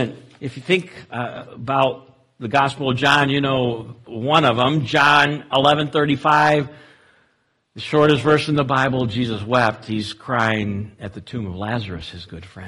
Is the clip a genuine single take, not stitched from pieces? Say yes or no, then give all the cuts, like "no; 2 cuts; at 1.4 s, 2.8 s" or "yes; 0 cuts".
yes; 0 cuts